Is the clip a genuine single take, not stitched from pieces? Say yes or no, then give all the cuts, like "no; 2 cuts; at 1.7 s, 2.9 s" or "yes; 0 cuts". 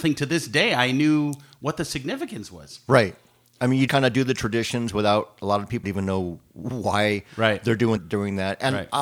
no; 3 cuts; at 3.9 s, 5.8 s, 8.0 s